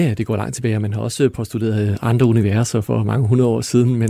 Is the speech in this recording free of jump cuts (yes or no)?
yes